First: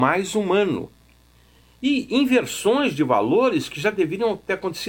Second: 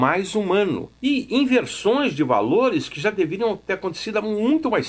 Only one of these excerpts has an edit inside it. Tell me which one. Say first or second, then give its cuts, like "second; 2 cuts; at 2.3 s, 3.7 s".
second; 1 cut; at 1.0 s